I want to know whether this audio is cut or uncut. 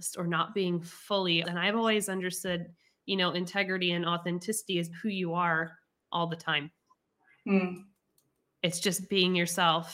cut